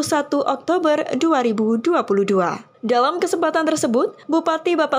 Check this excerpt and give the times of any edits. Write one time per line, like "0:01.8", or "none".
none